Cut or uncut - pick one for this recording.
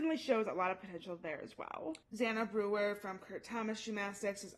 cut